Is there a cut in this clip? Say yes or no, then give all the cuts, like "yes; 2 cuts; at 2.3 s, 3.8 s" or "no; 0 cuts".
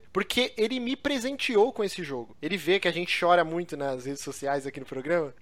no; 0 cuts